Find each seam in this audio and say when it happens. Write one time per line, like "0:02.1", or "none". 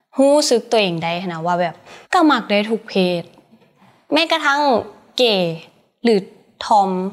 0:02.0